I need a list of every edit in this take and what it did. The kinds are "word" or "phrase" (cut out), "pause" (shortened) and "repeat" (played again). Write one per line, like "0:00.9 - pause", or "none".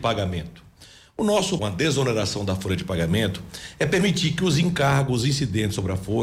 0:01.6 - phrase